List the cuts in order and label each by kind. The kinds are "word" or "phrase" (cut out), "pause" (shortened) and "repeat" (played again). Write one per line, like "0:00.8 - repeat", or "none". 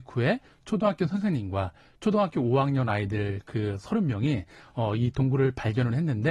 none